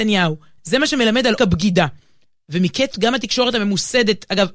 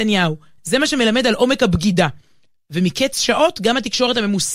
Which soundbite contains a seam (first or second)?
first